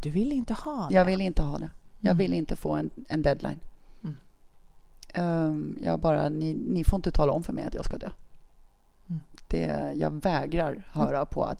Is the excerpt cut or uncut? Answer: uncut